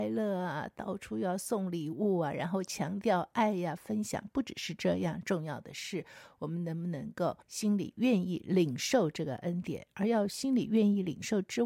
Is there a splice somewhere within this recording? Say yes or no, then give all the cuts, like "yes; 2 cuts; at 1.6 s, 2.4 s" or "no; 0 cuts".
yes; 1 cut; at 7.4 s